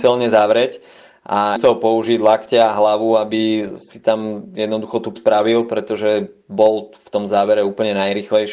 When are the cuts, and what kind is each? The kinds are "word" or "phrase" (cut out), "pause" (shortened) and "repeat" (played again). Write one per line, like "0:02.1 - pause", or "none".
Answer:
0:01.6 - phrase
0:05.2 - word